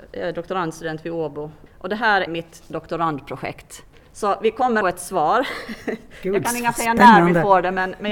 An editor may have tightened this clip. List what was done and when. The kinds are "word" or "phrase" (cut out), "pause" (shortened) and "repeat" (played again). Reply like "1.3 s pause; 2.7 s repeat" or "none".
1.7 s word; 2.3 s word; 3.9 s pause; 4.8 s phrase